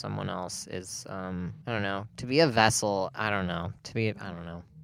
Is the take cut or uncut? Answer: cut